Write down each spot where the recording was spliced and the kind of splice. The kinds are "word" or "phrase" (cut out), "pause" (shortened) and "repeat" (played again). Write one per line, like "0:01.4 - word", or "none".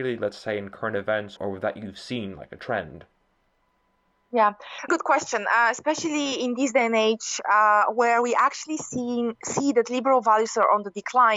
0:01.4 - word
0:04.9 - word